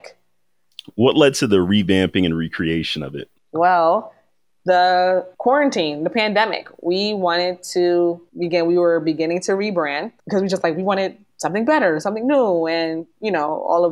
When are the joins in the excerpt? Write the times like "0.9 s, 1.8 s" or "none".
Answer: 3.4 s, 5.3 s, 8.3 s, 10.2 s

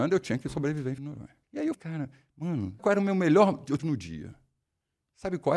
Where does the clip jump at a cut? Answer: 1.0 s, 1.4 s, 1.7 s, 2.8 s, 3.8 s

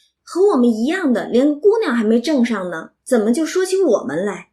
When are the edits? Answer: 3.0 s

